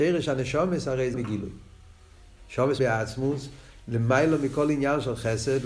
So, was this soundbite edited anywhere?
yes; 2 cuts; at 1.1 s, 2.8 s

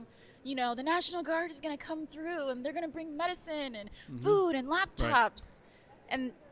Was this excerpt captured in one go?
yes; 0 cuts

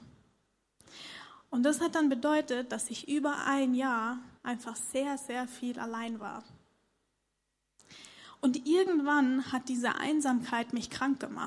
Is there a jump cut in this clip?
yes; 1 cut; at 4.4 s

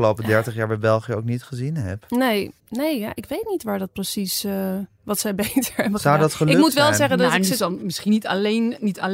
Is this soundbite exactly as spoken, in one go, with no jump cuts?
no; 1 cut; at 2.6 s

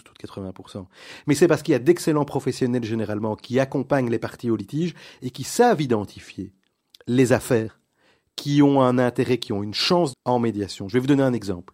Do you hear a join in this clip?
yes; 1 cut; at 10.1 s

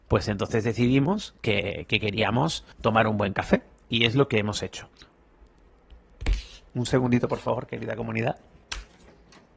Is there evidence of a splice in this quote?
yes; 1 cut; at 2.7 s

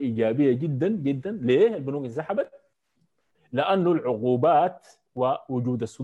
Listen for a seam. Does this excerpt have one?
no; 0 cuts

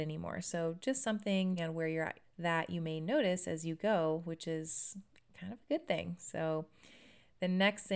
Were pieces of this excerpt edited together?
yes; 2 cuts; at 1.6 s, 2.2 s

